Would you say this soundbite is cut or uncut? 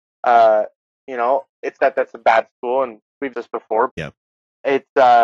cut